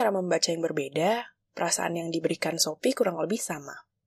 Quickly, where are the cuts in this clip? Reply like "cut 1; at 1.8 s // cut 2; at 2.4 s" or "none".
none

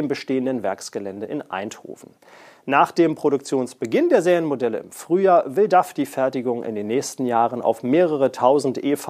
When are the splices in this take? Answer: none

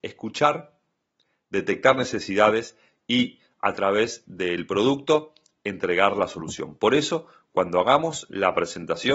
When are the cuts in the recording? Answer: none

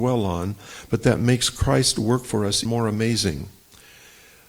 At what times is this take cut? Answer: cut 1; at 2.7 s

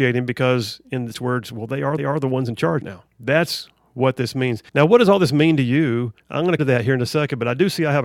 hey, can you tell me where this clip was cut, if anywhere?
cut 1; at 1.1 s // cut 2; at 2.0 s // cut 3; at 2.8 s // cut 4; at 3.1 s // cut 5; at 4.7 s // cut 6; at 6.2 s // cut 7; at 6.6 s

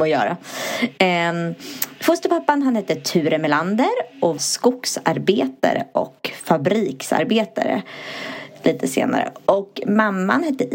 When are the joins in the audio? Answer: cut 1; at 4.4 s

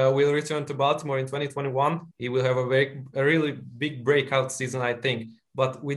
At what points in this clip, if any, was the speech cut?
cut 1; at 2.1 s

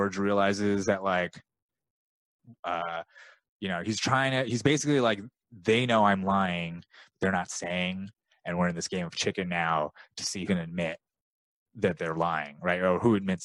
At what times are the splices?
cut 1; at 10.5 s

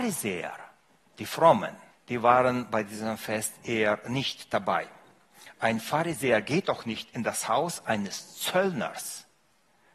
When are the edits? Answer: cut 1; at 1.9 s

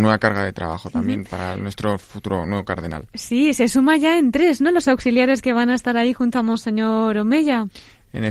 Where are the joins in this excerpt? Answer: cut 1; at 4.8 s

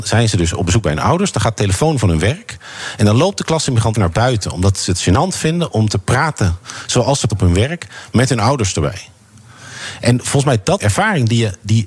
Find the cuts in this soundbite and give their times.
cut 1; at 3.9 s // cut 2; at 7.3 s // cut 3; at 10.8 s

